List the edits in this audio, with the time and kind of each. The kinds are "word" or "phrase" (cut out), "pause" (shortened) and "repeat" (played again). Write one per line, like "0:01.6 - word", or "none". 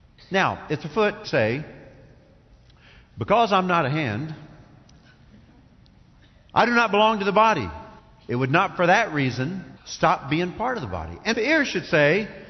0:01.2 - word
0:08.0 - pause
0:09.8 - pause
0:11.3 - word